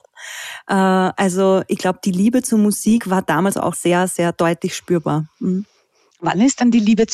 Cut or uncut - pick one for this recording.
cut